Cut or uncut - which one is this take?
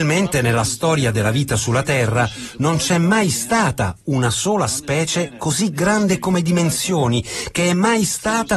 uncut